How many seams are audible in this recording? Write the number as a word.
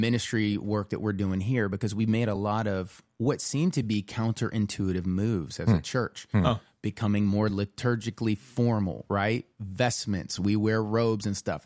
zero